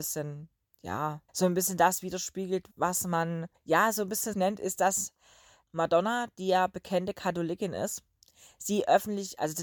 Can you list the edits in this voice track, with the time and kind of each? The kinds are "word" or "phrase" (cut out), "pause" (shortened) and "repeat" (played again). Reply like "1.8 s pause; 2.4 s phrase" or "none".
1.3 s pause; 2.7 s pause; 3.5 s pause; 4.3 s word